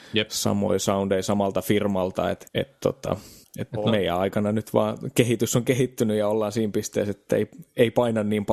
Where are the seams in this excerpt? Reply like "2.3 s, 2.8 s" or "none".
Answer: 2.5 s, 3.4 s